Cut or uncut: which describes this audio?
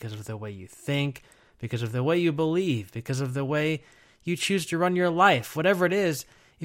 uncut